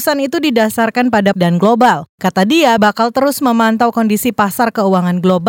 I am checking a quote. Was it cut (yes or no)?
yes